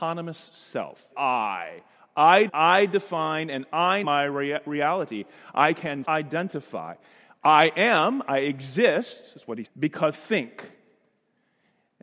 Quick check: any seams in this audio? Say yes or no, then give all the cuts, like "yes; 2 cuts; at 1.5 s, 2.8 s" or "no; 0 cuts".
yes; 6 cuts; at 1.1 s, 2.5 s, 4.0 s, 6.0 s, 9.7 s, 10.1 s